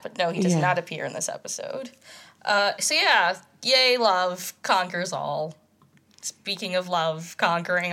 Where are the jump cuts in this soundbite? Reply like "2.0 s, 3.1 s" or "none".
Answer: none

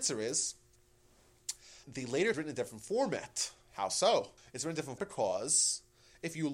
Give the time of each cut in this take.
1.8 s, 2.3 s, 4.4 s, 5.0 s

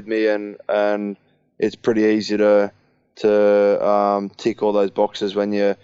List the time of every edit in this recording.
none

